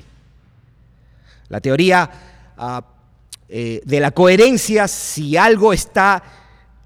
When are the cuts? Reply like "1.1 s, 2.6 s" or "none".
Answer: none